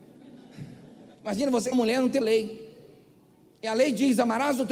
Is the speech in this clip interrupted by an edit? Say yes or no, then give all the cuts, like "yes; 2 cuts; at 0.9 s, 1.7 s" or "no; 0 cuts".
yes; 3 cuts; at 1.1 s, 1.7 s, 2.2 s